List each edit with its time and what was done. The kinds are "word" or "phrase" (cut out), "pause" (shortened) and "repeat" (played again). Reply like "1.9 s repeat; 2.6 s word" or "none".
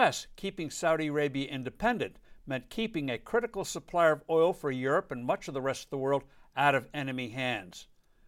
none